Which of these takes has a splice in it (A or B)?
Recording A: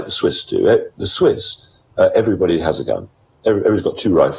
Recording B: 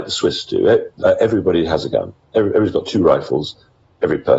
B